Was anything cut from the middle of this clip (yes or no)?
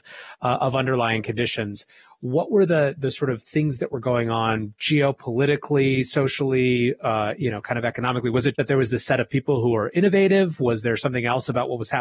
yes